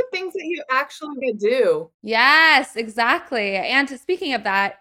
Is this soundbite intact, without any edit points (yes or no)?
no